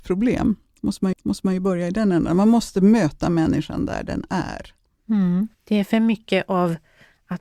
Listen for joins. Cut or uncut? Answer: cut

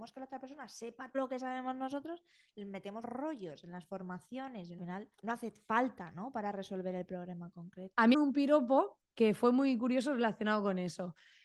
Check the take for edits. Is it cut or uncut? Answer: cut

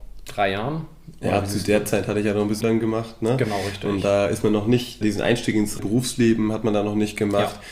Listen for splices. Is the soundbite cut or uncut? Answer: cut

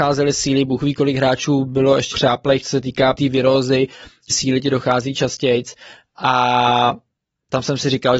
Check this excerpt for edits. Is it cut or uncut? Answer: cut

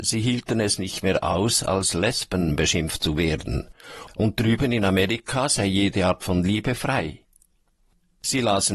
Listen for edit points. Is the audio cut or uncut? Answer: uncut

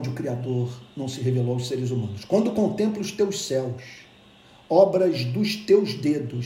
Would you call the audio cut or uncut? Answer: uncut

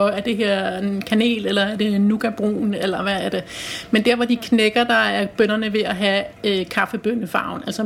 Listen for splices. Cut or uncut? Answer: uncut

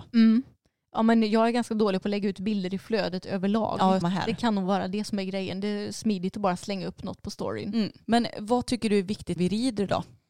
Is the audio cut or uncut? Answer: cut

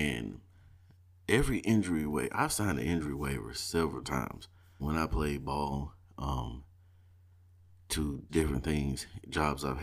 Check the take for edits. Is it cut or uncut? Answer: cut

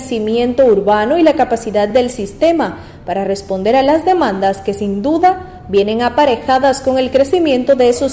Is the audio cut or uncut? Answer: uncut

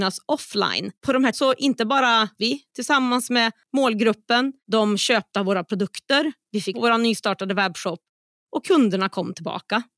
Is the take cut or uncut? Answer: cut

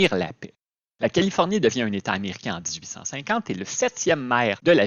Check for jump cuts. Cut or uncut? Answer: uncut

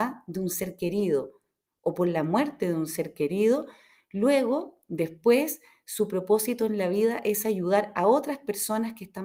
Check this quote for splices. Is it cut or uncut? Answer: uncut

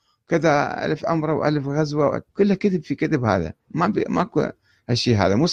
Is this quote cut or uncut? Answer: cut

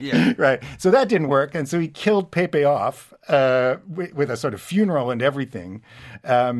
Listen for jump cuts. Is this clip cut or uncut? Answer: uncut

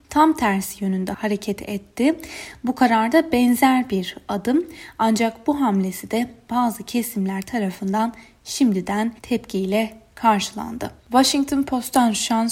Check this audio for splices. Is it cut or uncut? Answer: cut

